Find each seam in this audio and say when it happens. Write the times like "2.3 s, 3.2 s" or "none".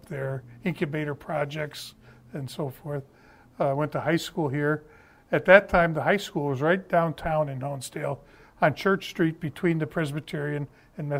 none